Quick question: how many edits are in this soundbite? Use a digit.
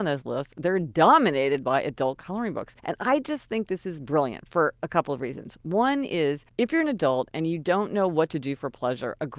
2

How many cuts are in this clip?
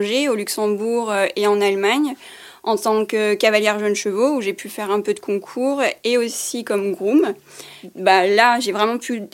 0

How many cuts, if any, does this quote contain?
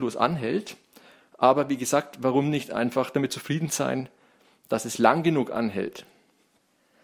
0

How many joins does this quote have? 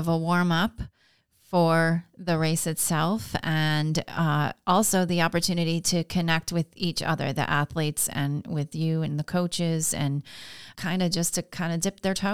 1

